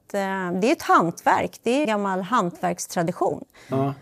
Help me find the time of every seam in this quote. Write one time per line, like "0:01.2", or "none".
0:01.8